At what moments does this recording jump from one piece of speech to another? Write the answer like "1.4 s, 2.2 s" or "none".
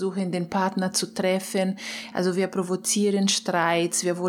none